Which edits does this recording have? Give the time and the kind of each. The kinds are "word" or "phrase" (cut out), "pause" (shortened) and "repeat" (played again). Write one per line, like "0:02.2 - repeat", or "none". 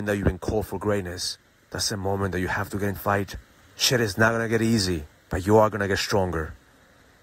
0:01.5 - pause
0:03.0 - word
0:03.5 - pause
0:05.1 - pause